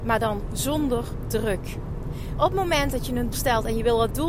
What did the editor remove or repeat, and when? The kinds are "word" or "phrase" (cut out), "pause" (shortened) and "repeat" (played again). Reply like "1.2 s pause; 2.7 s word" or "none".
2.4 s word; 3.3 s word